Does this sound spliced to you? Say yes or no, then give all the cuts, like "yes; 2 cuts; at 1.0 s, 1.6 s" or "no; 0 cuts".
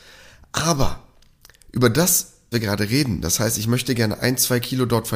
yes; 1 cut; at 2.5 s